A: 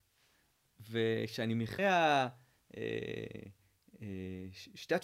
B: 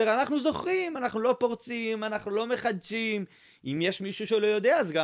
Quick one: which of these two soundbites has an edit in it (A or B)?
A